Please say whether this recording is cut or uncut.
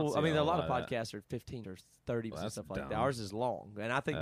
cut